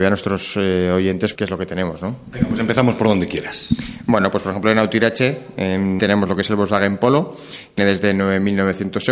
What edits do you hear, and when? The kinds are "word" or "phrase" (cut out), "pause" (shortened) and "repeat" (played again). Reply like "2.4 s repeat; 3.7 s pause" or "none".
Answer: 1.3 s word; 6.0 s word; 7.8 s word

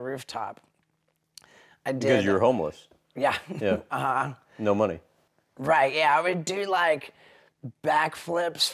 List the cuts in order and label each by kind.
none

